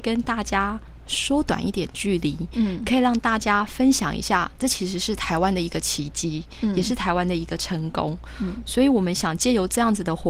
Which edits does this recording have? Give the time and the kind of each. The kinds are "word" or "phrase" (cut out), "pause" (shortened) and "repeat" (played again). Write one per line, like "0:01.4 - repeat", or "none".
none